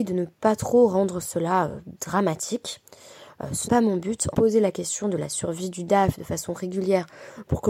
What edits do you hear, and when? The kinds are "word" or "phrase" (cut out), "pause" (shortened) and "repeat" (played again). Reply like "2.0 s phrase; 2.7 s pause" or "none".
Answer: 3.7 s word; 4.3 s phrase